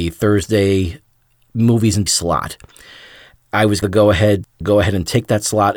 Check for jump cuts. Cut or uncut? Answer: cut